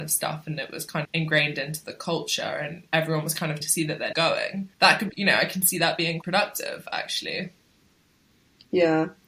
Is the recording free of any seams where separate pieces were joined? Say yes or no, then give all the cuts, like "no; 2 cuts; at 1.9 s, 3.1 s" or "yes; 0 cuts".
no; 7 cuts; at 1.0 s, 2.9 s, 3.6 s, 4.1 s, 4.7 s, 5.1 s, 6.2 s